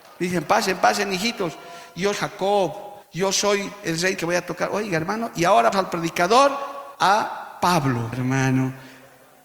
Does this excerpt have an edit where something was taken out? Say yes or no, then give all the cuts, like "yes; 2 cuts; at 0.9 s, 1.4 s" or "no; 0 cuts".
yes; 6 cuts; at 2.1 s, 3.0 s, 4.2 s, 5.7 s, 6.9 s, 8.1 s